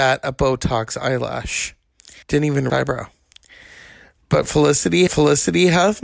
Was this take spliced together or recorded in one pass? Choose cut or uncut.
cut